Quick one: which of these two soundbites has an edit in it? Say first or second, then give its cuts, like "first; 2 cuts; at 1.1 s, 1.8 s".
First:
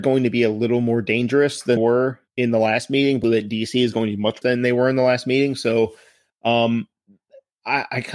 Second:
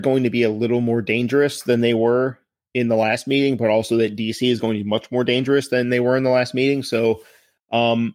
first; 4 cuts; at 1.8 s, 2.3 s, 3.2 s, 4.4 s